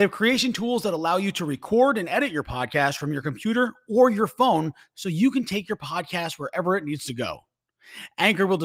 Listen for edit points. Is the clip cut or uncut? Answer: uncut